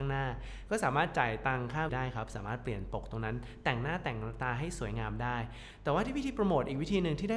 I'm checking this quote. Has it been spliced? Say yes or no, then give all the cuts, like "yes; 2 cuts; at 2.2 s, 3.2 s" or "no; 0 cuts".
yes; 1 cut; at 1.9 s